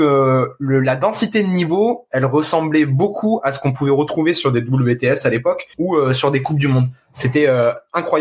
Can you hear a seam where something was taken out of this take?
yes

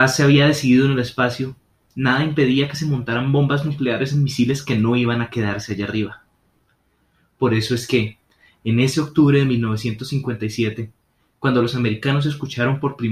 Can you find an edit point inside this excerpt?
no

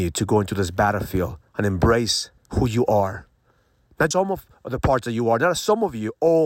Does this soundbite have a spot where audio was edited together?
yes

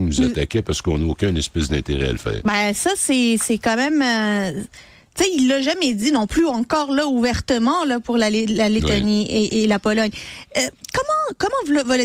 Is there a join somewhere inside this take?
no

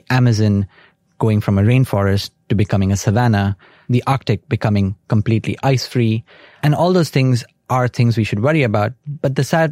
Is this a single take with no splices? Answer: yes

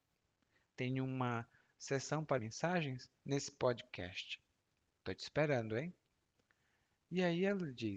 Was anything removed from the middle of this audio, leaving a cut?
yes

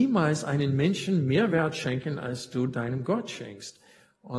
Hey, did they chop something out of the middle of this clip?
no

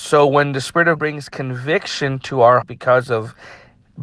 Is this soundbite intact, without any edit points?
no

